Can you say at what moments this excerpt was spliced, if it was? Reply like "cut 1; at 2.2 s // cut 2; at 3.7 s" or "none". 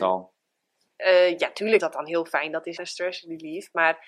cut 1; at 1.8 s // cut 2; at 2.8 s

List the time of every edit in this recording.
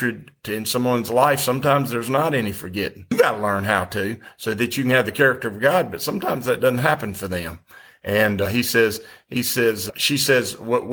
none

